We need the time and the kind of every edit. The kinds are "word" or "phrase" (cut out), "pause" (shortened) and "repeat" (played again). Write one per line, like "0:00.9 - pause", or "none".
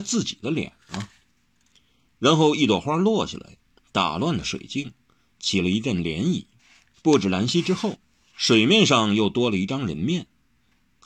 0:06.6 - pause